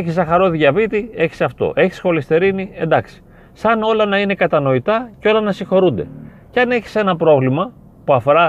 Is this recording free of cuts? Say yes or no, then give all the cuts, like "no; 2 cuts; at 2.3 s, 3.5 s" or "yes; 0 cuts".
yes; 0 cuts